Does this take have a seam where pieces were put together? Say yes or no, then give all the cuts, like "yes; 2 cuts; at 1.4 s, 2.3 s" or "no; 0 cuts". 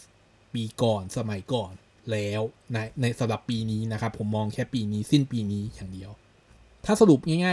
no; 0 cuts